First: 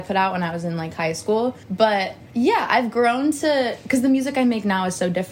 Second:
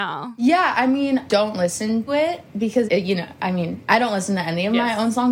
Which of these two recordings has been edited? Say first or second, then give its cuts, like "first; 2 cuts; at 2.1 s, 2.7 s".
second; 3 cuts; at 1.3 s, 2.1 s, 2.9 s